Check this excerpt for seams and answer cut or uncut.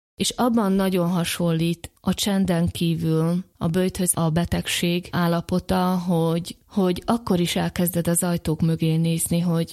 cut